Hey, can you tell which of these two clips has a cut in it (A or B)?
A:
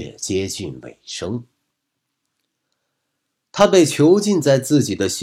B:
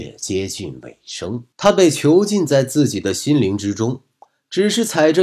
B